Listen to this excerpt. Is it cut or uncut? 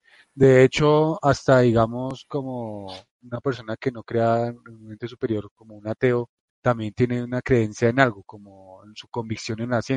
cut